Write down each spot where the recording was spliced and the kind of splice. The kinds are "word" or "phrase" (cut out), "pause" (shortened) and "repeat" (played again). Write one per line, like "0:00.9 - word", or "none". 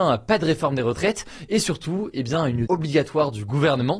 0:02.7 - word